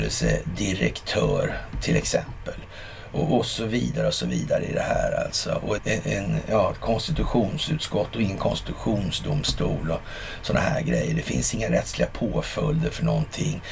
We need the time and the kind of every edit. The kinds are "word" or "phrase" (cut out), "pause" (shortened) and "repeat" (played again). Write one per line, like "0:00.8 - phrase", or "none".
0:03.4 - word
0:05.8 - word